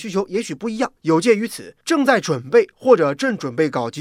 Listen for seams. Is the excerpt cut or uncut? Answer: cut